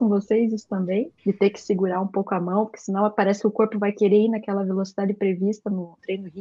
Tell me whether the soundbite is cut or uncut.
uncut